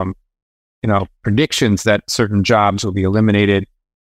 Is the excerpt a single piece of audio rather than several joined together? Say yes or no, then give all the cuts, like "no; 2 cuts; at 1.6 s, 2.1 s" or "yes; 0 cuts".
yes; 0 cuts